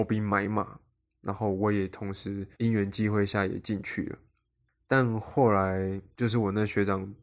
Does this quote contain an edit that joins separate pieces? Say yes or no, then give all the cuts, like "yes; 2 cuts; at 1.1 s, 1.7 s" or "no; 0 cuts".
yes; 1 cut; at 2.5 s